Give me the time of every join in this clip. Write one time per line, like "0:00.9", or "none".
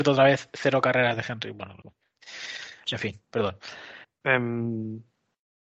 0:01.8
0:04.0